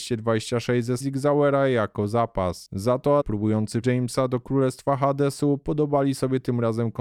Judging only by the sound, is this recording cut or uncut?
cut